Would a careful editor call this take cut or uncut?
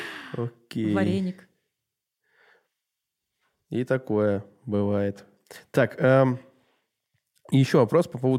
uncut